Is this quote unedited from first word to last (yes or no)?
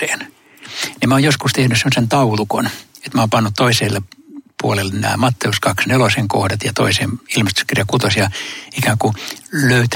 yes